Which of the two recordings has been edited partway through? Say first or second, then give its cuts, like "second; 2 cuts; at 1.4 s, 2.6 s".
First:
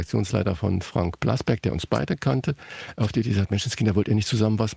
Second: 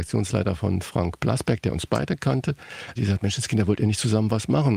second; 1 cut; at 3.0 s